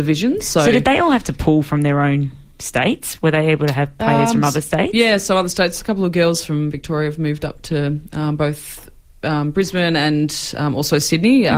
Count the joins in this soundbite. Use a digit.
0